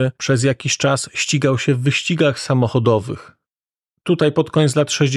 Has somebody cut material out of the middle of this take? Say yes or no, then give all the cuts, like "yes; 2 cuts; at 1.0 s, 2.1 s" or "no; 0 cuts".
no; 0 cuts